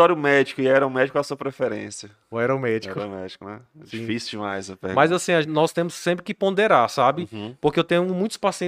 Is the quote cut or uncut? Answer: uncut